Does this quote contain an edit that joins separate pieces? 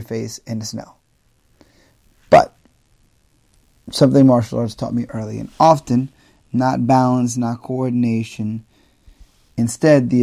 no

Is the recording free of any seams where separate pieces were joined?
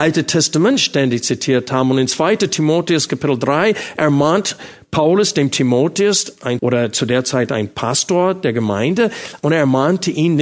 no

